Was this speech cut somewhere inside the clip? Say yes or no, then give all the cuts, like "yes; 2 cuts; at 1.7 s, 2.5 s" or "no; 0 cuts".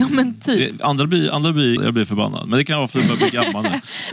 yes; 1 cut; at 1.8 s